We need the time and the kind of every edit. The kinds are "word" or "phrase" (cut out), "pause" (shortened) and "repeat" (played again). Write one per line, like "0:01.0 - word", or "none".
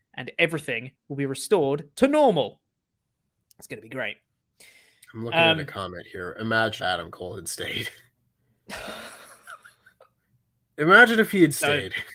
0:06.8 - word